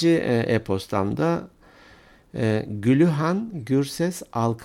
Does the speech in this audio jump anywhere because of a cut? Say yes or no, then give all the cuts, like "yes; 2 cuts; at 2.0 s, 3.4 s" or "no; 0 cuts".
no; 0 cuts